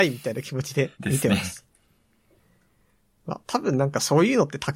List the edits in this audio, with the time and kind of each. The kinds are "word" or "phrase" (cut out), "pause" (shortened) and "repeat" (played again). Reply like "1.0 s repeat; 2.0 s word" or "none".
0.9 s pause; 3.4 s pause